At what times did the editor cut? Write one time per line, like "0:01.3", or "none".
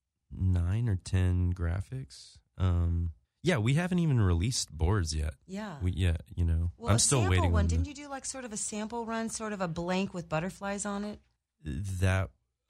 0:03.2
0:11.4